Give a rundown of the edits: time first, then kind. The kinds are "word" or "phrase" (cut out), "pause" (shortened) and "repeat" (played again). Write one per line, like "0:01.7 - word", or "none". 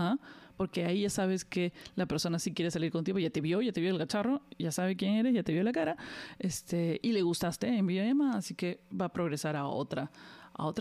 none